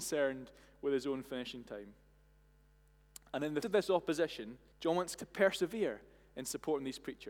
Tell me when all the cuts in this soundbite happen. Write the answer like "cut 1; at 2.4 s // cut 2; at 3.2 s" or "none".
cut 1; at 3.6 s // cut 2; at 4.7 s // cut 3; at 5.2 s